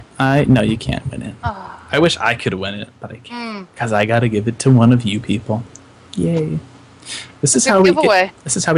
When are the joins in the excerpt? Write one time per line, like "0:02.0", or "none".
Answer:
none